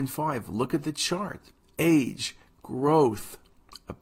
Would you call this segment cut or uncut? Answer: uncut